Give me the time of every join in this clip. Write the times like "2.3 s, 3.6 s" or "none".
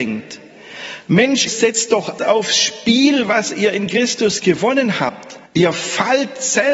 1.5 s, 2.2 s, 5.4 s